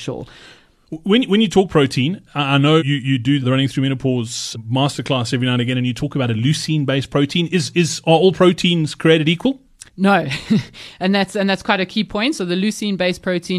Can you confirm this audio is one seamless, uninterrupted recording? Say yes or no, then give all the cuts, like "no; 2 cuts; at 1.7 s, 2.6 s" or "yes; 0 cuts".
no; 5 cuts; at 2.3 s, 2.8 s, 3.4 s, 4.5 s, 9.9 s